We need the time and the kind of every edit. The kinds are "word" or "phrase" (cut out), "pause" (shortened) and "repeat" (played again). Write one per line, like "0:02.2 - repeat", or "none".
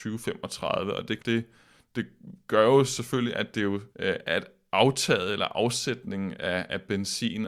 0:01.2 - word
0:03.9 - pause

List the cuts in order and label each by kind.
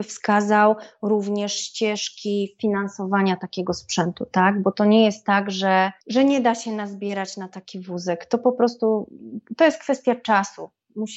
none

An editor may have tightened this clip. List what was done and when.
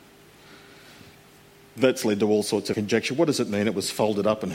0:02.7 - word

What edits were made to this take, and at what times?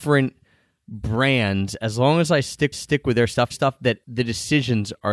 0:02.7 - repeat
0:03.5 - phrase
0:04.0 - pause

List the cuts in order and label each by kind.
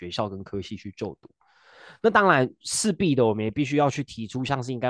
none

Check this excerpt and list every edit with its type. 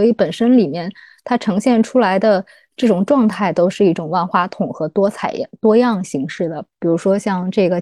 none

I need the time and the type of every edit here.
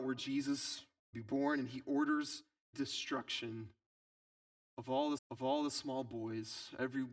0:01.1 - word
0:02.7 - phrase
0:05.2 - repeat

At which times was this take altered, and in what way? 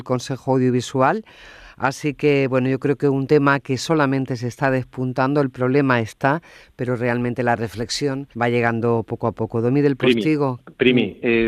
0:08.3 - pause

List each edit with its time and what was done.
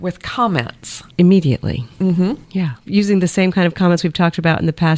0:01.1 - pause
0:02.4 - pause

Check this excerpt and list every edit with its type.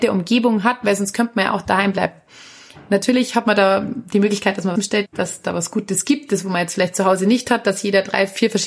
0:04.8 - phrase
0:05.1 - word

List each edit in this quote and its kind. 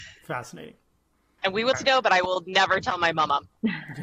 0:01.7 - word

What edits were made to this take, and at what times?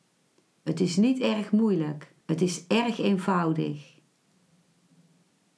0:02.2 - pause

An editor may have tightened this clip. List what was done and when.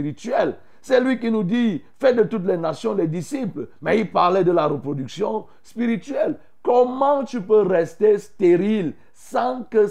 none

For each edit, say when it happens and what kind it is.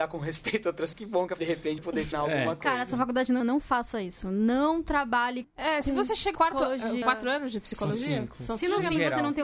0:00.9 - word
0:01.4 - word
0:01.8 - word
0:02.1 - word
0:03.4 - word
0:05.4 - word
0:06.3 - word
0:07.0 - word

